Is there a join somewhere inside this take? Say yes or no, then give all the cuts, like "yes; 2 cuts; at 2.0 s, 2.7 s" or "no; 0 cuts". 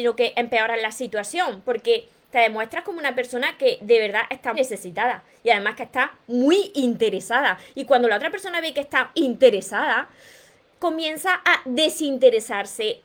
yes; 2 cuts; at 4.5 s, 9.1 s